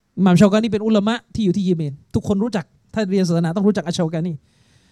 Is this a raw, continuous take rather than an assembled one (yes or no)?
no